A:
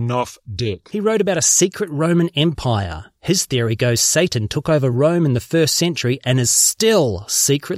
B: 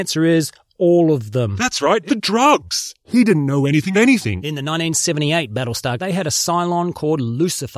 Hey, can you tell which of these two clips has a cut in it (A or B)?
B